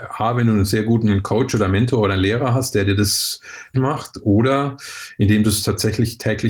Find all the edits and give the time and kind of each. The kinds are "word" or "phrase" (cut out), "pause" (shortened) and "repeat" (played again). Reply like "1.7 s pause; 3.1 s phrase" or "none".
3.7 s word